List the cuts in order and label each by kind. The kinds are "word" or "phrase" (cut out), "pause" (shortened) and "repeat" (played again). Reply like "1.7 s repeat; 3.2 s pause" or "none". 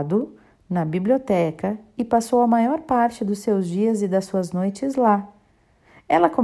none